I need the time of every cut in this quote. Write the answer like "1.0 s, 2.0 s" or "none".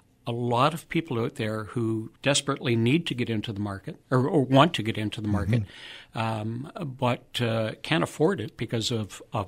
2.2 s